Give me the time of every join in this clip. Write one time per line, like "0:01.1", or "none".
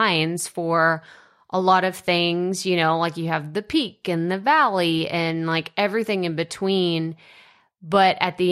none